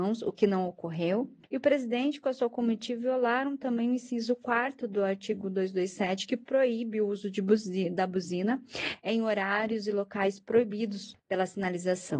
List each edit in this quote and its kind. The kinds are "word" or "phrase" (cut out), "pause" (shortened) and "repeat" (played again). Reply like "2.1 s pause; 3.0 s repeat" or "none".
none